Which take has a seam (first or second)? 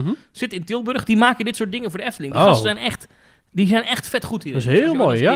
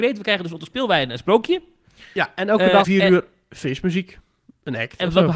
second